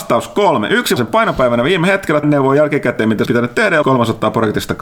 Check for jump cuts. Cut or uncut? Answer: cut